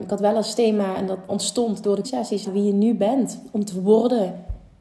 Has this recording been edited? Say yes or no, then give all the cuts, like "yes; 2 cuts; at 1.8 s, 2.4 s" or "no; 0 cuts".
yes; 3 cuts; at 1.3 s, 2.0 s, 2.4 s